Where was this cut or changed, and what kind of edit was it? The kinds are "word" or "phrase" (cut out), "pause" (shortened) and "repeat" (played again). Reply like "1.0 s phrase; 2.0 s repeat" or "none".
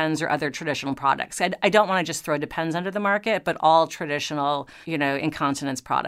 4.8 s word